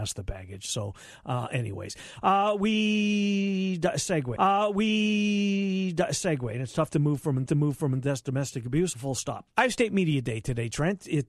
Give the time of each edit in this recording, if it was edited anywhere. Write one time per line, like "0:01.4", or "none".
0:04.4
0:07.5
0:08.9
0:09.5